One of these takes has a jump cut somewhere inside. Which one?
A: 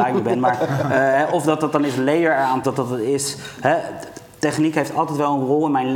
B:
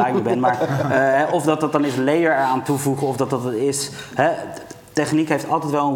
A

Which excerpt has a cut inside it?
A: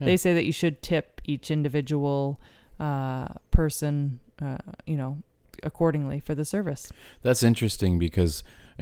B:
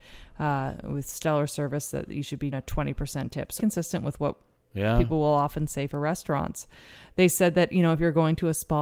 B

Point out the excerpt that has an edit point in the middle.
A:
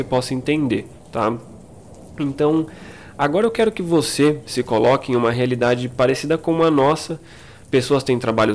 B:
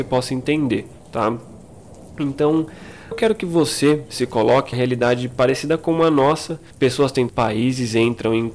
B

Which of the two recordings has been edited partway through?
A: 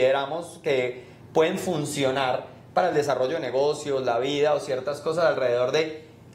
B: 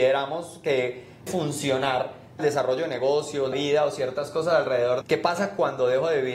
B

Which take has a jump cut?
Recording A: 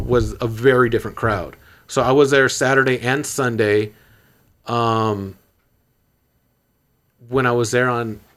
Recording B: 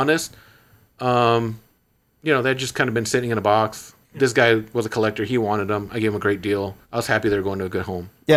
B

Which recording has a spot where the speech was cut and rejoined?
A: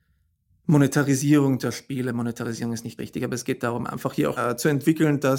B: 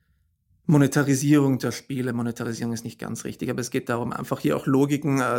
A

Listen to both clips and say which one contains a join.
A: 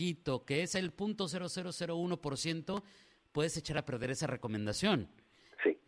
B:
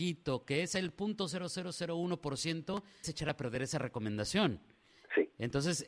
B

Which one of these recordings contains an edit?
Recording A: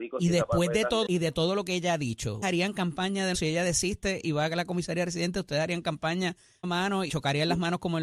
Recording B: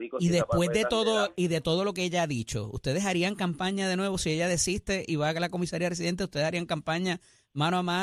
A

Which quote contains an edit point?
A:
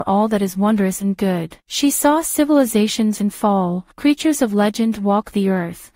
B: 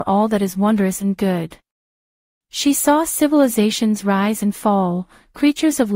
A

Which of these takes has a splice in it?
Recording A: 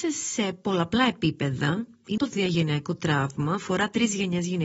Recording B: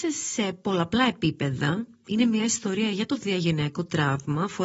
A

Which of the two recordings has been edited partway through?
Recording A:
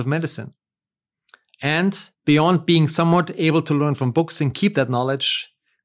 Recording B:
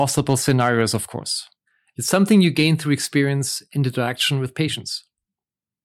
A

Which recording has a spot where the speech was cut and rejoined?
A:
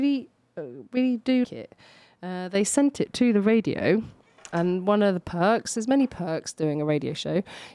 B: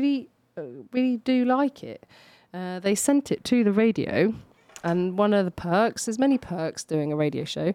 A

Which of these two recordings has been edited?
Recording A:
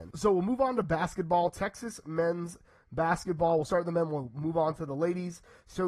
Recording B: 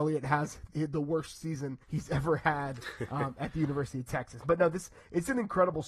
B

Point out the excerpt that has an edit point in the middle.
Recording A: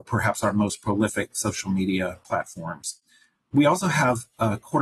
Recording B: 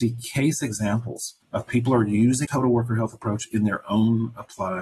B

